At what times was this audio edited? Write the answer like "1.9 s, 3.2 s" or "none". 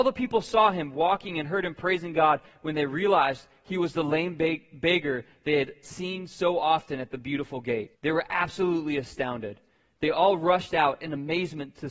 7.9 s